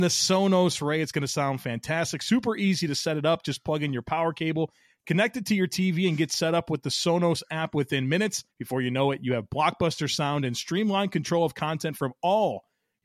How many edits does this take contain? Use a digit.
1